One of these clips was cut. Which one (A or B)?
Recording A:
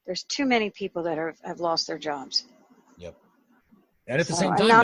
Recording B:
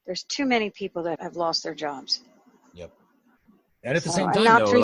B